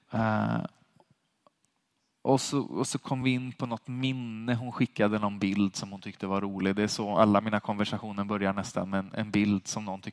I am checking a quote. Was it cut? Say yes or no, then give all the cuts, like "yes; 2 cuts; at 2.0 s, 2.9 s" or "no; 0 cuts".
no; 0 cuts